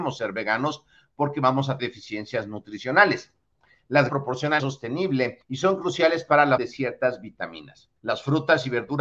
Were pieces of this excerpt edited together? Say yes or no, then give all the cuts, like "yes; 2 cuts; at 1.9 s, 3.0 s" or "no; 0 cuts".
yes; 6 cuts; at 1.8 s, 4.1 s, 4.6 s, 5.4 s, 6.6 s, 8.0 s